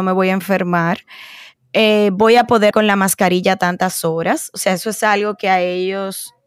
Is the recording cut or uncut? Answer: cut